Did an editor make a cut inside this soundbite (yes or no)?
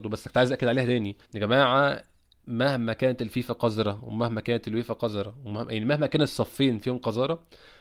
yes